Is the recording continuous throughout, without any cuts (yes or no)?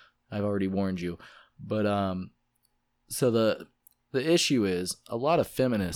yes